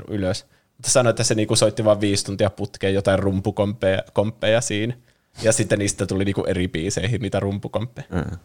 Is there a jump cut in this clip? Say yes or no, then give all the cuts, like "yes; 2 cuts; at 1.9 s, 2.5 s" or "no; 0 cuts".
no; 0 cuts